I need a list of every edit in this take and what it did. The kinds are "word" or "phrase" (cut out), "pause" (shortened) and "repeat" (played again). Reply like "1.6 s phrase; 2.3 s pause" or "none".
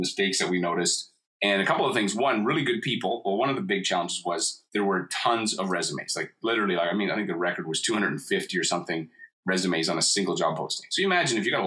4.7 s pause